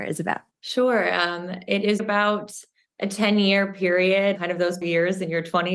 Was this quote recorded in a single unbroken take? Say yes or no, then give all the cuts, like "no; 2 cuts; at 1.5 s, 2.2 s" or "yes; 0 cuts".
no; 2 cuts; at 2.0 s, 4.8 s